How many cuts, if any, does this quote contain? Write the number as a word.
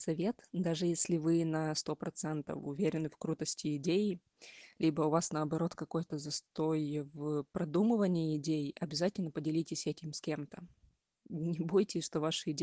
zero